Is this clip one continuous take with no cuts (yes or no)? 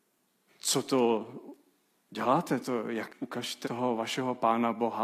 no